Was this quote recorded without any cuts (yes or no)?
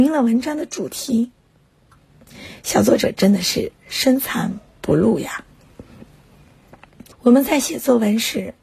no